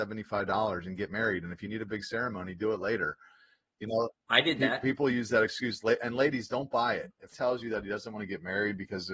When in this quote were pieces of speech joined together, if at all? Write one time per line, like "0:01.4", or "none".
0:07.3